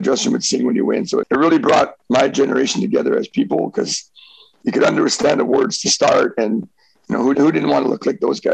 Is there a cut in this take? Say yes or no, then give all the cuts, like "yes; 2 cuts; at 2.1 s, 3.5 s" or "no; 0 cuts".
yes; 2 cuts; at 1.2 s, 7.3 s